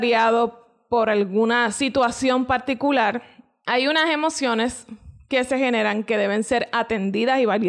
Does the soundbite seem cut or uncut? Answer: uncut